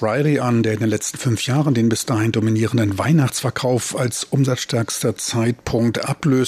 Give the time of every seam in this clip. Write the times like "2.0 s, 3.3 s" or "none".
none